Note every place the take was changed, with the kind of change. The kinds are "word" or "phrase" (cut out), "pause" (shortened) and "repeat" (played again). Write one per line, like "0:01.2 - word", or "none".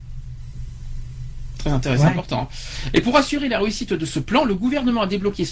none